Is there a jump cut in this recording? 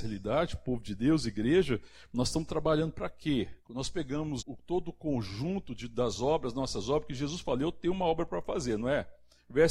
yes; 2 cuts; at 3.6 s, 4.4 s

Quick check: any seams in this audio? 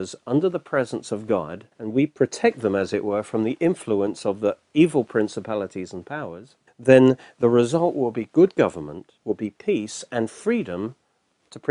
yes; 3 cuts; at 1.7 s, 6.7 s, 9.2 s

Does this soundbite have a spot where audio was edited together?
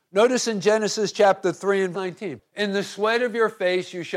yes; 2 cuts; at 1.9 s, 2.5 s

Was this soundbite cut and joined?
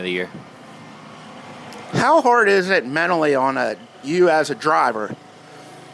yes; 1 cut; at 3.9 s

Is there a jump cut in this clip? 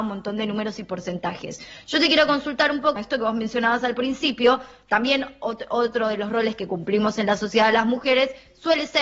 yes; 1 cut; at 3.0 s

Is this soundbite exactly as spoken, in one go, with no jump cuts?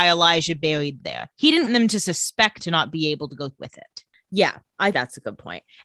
no; 5 cuts; at 1.0 s, 1.7 s, 2.6 s, 3.6 s, 4.9 s

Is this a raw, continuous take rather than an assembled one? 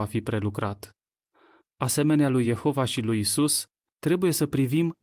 yes; 0 cuts

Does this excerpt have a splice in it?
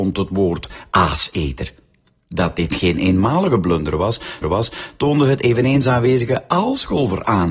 yes; 1 cut; at 4.4 s

